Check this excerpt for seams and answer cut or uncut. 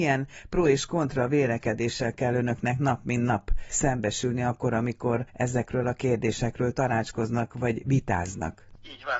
uncut